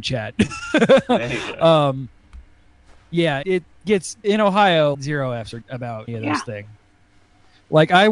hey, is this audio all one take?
no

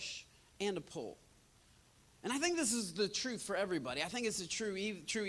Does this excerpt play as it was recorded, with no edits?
yes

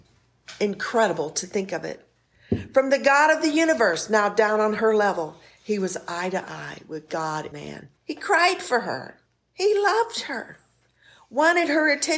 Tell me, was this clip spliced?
yes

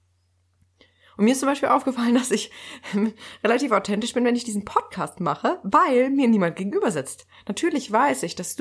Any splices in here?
no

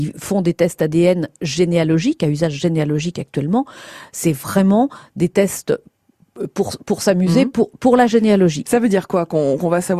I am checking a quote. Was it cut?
no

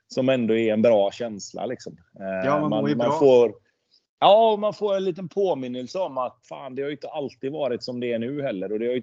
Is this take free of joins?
no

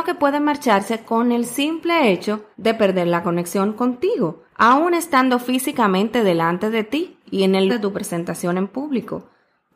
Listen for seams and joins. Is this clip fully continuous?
no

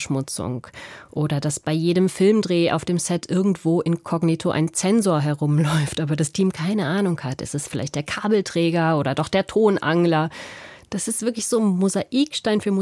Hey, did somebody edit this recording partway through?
no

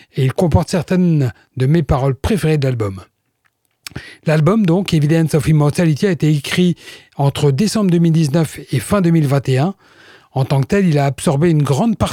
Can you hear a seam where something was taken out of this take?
no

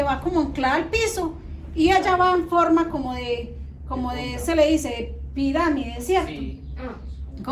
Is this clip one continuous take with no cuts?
yes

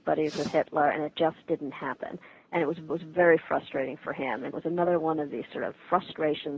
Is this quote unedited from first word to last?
no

